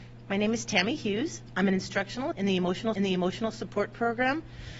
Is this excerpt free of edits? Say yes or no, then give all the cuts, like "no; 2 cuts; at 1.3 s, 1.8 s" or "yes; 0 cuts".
no; 2 cuts; at 2.3 s, 3.0 s